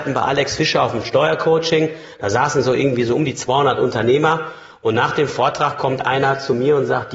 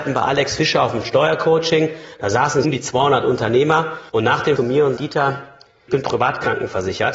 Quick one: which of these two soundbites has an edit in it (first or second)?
second